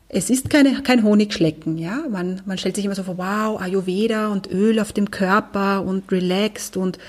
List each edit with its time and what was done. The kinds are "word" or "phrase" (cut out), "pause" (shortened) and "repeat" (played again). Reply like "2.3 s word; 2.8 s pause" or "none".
none